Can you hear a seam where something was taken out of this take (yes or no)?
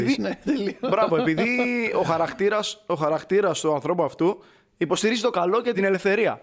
no